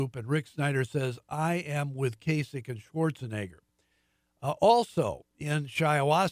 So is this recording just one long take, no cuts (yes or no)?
yes